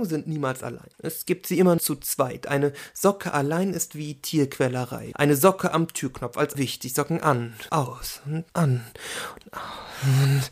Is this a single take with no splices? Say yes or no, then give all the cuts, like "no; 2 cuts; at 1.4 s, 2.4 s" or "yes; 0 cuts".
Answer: no; 6 cuts; at 0.9 s, 1.8 s, 5.1 s, 6.5 s, 7.7 s, 8.5 s